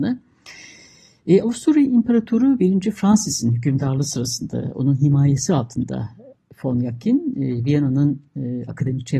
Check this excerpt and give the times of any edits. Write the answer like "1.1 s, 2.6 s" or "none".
none